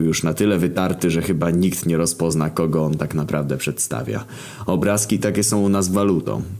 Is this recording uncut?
yes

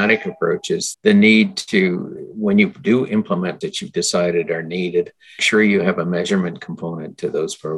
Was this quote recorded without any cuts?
no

